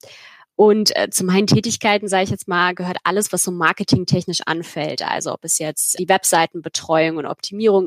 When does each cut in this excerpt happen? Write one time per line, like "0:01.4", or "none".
0:06.0

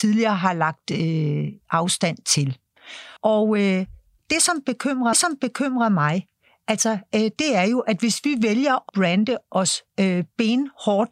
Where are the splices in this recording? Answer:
0:03.2
0:05.1
0:08.9

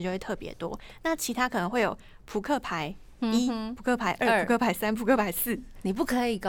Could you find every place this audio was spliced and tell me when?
none

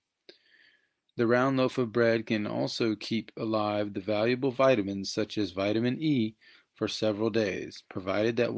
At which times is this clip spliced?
none

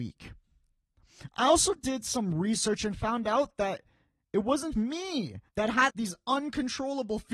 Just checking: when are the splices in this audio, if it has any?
0:04.7
0:05.5
0:05.9

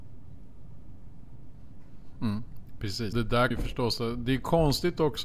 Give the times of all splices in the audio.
0:03.1
0:03.5

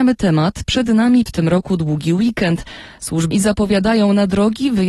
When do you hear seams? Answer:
0:01.3
0:03.3

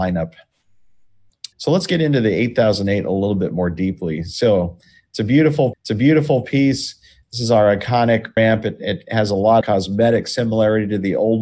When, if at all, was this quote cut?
0:01.5
0:05.7
0:08.4
0:09.6

